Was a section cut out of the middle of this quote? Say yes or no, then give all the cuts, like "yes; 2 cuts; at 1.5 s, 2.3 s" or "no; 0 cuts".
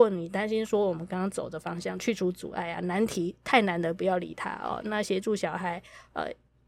no; 0 cuts